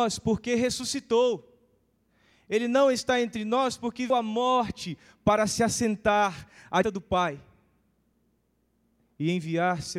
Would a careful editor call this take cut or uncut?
cut